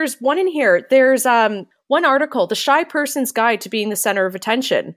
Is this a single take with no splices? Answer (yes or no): yes